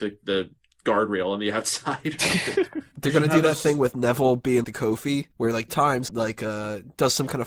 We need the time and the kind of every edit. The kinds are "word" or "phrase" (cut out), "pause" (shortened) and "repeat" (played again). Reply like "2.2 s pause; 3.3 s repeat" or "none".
4.6 s word; 5.3 s pause; 5.7 s word; 6.1 s phrase